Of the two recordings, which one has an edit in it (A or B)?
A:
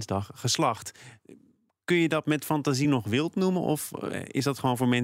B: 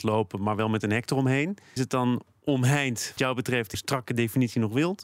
B